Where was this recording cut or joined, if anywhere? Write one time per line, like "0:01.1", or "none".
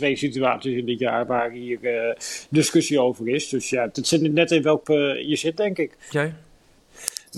0:04.3
0:04.8
0:06.1